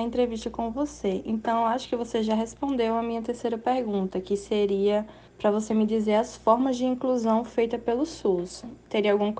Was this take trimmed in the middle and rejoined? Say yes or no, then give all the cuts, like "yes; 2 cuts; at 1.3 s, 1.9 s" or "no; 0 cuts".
yes; 1 cut; at 5.3 s